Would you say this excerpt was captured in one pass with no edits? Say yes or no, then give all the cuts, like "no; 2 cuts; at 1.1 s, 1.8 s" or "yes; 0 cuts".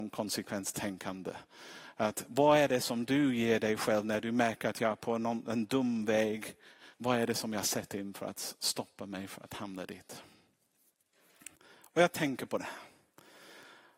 no; 2 cuts; at 6.9 s, 11.6 s